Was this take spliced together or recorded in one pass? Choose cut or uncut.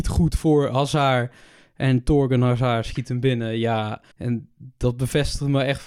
cut